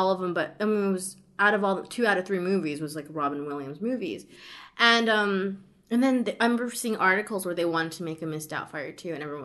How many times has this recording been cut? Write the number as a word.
zero